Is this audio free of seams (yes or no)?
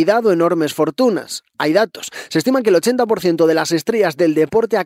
yes